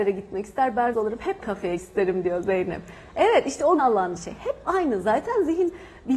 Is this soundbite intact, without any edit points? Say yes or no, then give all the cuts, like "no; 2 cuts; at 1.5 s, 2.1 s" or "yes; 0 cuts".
no; 5 cuts; at 0.9 s, 1.4 s, 1.8 s, 3.8 s, 4.2 s